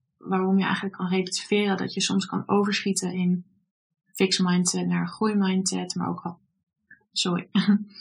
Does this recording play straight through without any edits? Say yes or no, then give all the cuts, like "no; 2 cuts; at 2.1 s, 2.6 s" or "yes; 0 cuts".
yes; 0 cuts